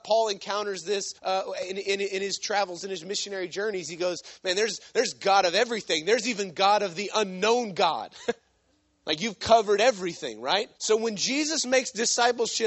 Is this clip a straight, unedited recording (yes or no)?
no